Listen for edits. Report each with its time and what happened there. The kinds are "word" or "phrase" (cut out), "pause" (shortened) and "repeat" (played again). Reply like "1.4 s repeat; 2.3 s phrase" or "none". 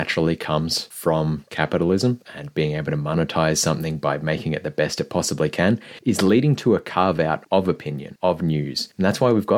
none